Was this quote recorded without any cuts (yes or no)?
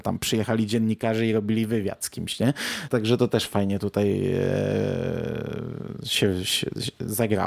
yes